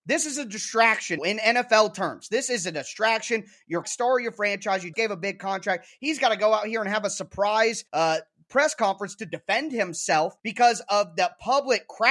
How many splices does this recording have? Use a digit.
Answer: 5